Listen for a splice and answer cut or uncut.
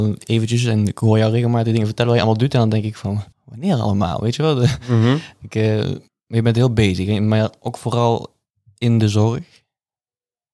cut